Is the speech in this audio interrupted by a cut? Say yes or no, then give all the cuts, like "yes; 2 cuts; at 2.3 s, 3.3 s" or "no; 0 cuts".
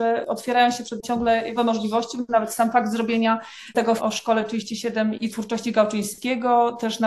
yes; 4 cuts; at 1.0 s, 1.6 s, 4.0 s, 5.1 s